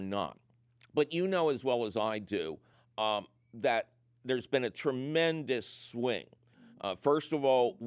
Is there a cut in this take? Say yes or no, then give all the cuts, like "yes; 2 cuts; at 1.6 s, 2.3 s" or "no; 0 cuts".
no; 0 cuts